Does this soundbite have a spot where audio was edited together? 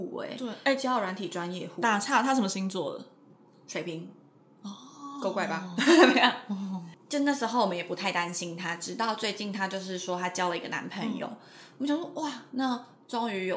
no; 0 cuts

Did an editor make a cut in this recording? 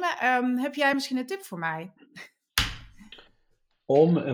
no; 0 cuts

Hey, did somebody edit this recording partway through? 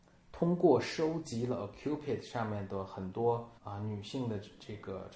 yes; 1 cut; at 3.6 s

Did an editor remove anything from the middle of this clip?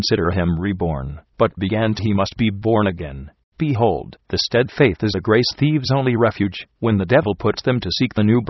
yes; 3 cuts; at 2.0 s, 3.5 s, 5.1 s

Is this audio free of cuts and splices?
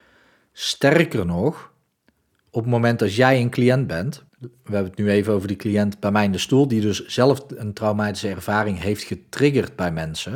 no; 1 cut; at 4.3 s

